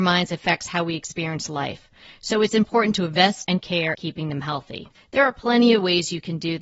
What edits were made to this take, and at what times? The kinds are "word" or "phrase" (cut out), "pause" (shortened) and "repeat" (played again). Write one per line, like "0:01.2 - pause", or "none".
0:03.4 - word
0:03.9 - word
0:04.9 - pause

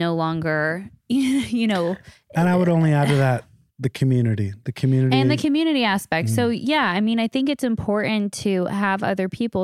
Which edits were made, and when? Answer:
none

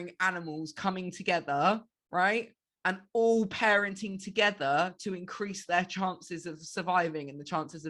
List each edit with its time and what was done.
none

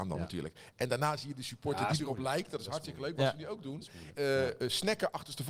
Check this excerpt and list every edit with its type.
0:04.1 - word

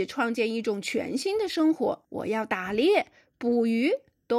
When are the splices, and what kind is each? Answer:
0:02.0 - pause

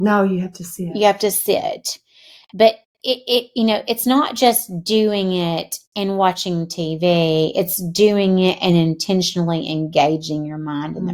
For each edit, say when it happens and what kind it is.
none

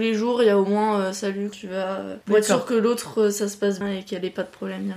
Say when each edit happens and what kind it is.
0:01.5 - word
0:02.2 - pause
0:03.8 - word

